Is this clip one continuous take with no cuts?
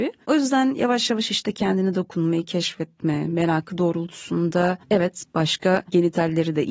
no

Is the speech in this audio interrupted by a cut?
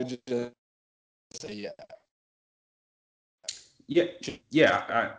no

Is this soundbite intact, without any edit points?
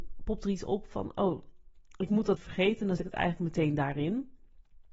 no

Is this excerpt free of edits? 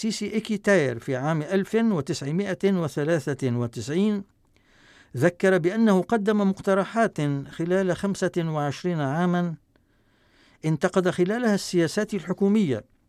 yes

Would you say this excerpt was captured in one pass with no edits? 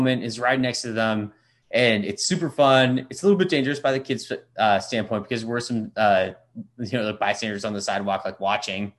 yes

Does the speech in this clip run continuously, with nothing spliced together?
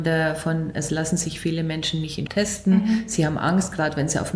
no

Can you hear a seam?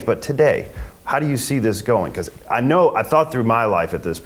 no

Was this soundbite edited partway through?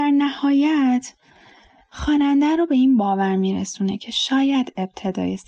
no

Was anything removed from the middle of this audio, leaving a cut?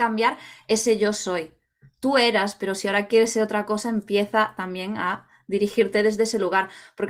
no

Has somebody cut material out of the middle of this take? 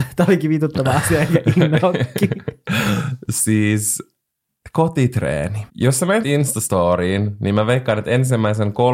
yes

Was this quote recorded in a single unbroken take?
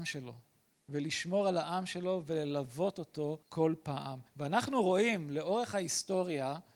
no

